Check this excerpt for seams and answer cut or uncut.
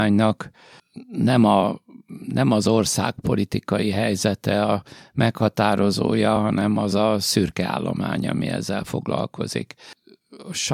uncut